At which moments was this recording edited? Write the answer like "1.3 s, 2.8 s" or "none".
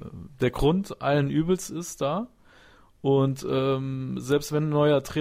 none